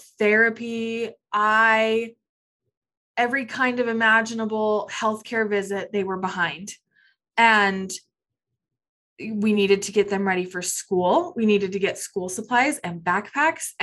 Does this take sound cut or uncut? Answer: uncut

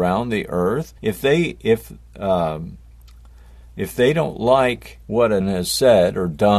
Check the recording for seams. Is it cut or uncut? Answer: cut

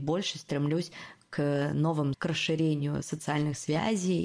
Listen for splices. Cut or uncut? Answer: cut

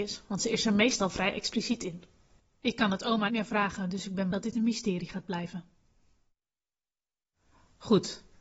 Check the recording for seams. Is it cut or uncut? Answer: cut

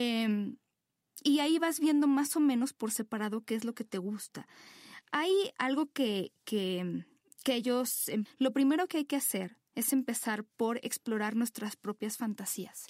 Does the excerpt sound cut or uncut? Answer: cut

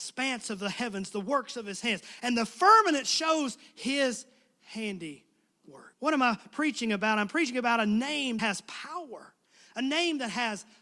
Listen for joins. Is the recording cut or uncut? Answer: cut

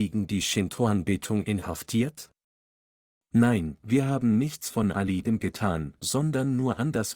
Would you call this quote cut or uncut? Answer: uncut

